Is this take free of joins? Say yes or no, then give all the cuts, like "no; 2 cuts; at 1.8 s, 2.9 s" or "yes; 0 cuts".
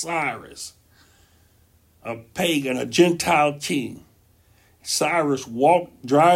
yes; 0 cuts